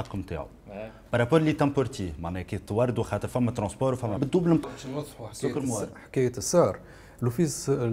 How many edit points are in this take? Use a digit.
2